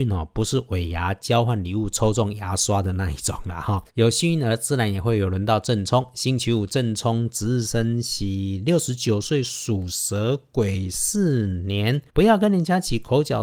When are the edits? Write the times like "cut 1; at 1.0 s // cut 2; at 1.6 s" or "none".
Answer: cut 1; at 3.9 s // cut 2; at 12.1 s